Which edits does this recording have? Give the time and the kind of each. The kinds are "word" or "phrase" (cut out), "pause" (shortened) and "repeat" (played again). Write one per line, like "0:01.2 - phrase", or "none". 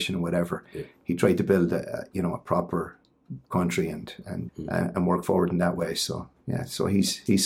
0:04.5 - word